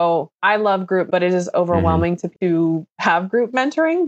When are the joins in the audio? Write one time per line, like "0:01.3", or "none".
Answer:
0:01.1
0:01.5
0:02.3